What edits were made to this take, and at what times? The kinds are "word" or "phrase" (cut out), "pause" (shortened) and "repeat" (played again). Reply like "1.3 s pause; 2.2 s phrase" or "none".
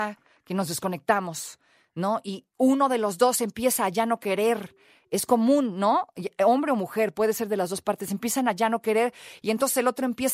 none